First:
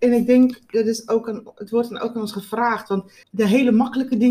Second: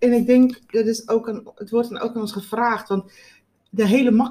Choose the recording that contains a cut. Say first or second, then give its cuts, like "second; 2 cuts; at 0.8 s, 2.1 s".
first; 1 cut; at 3.2 s